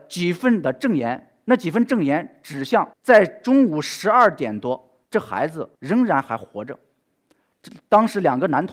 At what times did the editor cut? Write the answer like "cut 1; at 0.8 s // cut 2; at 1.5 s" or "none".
cut 1; at 2.9 s // cut 2; at 5.0 s // cut 3; at 5.7 s